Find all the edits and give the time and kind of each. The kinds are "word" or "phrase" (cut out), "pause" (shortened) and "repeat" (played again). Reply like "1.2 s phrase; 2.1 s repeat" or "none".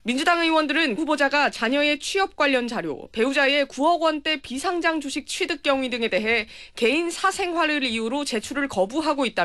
1.0 s word